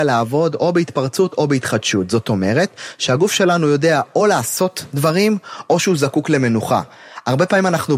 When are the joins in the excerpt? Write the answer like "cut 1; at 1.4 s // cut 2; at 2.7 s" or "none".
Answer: none